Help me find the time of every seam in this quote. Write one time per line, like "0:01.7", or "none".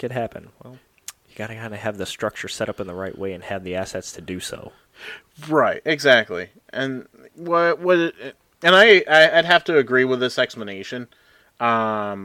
none

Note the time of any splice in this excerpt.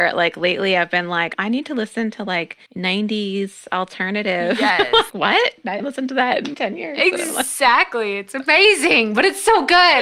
0:01.3
0:02.7
0:05.1
0:05.8
0:06.5

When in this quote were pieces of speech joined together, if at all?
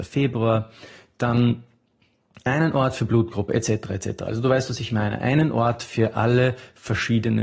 none

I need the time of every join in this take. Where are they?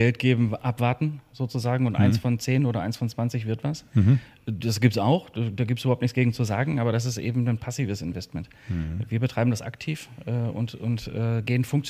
none

